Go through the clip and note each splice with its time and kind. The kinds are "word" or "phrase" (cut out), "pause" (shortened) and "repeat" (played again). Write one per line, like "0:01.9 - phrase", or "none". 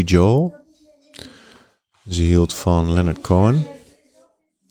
none